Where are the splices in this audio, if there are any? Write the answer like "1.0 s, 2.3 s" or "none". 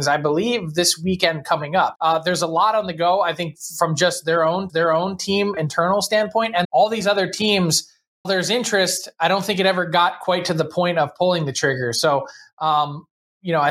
2.0 s, 4.7 s, 6.6 s, 8.2 s

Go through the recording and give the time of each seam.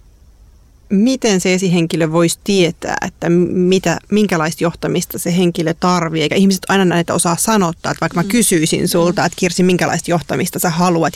none

